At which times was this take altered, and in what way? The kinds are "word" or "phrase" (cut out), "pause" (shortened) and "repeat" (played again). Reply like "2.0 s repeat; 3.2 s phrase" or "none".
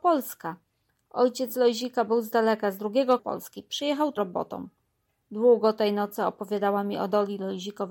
3.2 s word; 4.2 s word